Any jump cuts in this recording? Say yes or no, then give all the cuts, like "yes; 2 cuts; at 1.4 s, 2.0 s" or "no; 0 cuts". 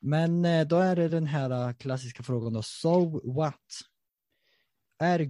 no; 0 cuts